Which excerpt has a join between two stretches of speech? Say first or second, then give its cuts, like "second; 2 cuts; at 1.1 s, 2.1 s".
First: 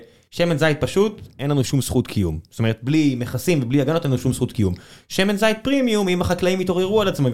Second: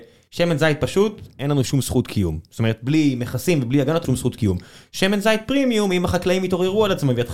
second; 1 cut; at 4.0 s